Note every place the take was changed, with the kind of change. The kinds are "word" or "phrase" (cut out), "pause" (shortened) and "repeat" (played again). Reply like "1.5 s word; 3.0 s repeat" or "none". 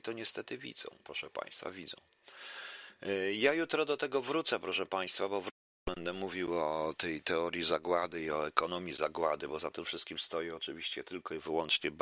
1.0 s pause

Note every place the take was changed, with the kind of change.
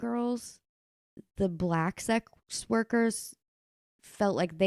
none

